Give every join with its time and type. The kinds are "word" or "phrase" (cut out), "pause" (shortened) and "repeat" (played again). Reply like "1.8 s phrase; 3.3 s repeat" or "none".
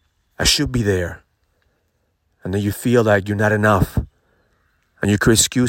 none

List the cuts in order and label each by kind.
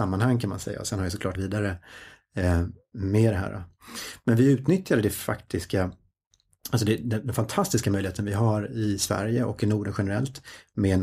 1.4 s word

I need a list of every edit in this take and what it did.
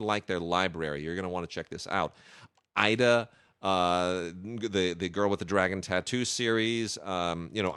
none

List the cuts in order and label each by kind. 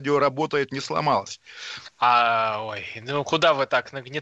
1.9 s pause

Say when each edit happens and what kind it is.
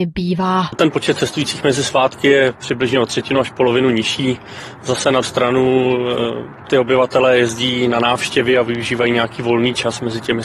5.2 s word

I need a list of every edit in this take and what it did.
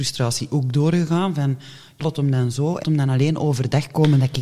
2.0 s word; 2.8 s word

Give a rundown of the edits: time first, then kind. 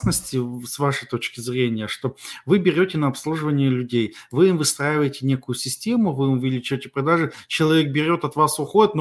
none

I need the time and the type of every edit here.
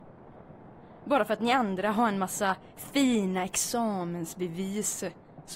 none

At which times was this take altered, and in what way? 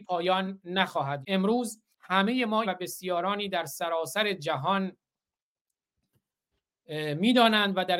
1.2 s word; 1.9 s pause; 2.6 s word

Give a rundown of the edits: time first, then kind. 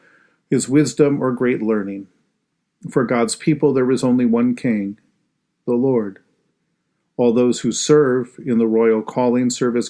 none

